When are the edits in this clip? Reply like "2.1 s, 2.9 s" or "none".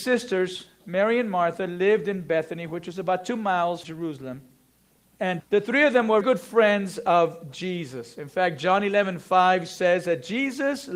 3.8 s, 5.4 s, 6.2 s